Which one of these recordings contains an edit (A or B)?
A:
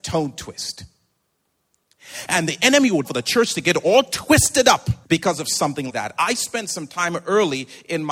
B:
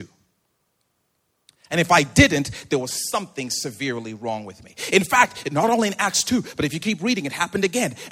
A